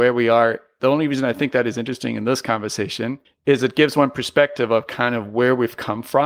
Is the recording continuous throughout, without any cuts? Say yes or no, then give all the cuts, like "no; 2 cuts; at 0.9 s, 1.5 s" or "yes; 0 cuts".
no; 1 cut; at 3.2 s